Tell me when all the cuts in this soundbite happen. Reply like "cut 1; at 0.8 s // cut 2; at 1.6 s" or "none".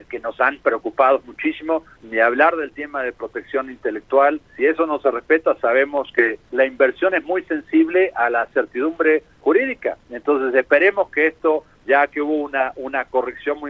cut 1; at 1.9 s // cut 2; at 4.5 s // cut 3; at 6.4 s // cut 4; at 9.3 s // cut 5; at 11.7 s